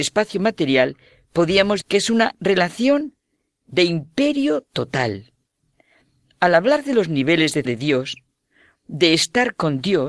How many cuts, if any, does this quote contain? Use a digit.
2